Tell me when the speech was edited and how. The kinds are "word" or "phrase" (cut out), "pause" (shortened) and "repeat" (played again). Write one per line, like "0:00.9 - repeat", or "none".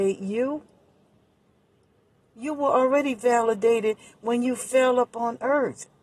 none